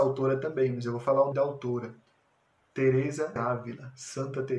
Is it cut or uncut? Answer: cut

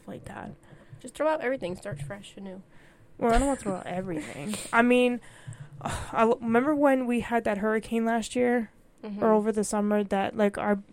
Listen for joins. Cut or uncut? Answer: uncut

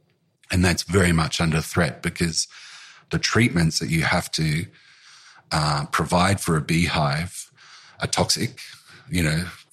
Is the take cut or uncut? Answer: uncut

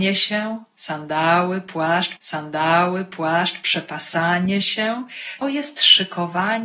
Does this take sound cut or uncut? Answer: cut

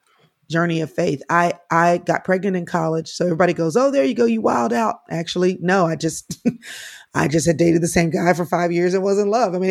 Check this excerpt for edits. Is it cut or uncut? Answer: uncut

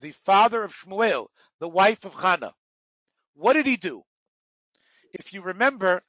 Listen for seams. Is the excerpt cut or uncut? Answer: uncut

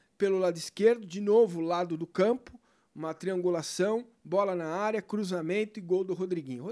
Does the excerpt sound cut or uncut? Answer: uncut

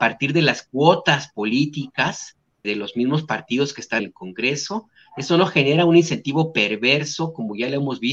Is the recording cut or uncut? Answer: cut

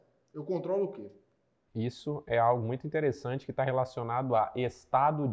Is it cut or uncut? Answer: uncut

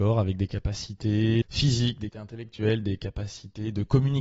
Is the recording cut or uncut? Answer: cut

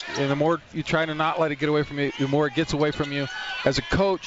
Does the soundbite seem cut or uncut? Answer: uncut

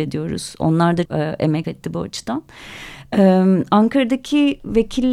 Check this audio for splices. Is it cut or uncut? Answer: cut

